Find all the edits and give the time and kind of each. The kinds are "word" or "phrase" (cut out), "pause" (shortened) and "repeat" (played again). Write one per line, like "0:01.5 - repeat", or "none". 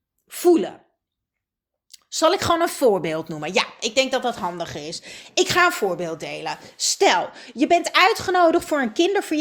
none